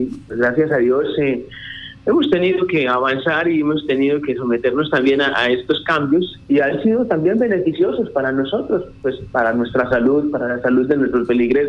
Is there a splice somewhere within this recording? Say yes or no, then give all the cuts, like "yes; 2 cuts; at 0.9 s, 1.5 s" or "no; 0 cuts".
yes; 1 cut; at 6.4 s